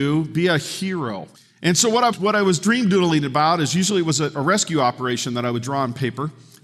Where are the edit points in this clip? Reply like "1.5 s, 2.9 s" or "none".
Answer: 1.3 s, 2.1 s